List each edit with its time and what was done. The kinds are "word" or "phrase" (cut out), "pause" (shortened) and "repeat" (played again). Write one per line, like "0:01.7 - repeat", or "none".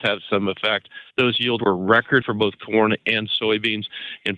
0:01.1 - pause
0:01.6 - word
0:02.2 - word